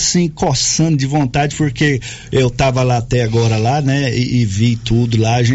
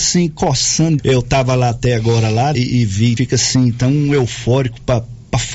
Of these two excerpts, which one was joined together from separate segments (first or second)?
second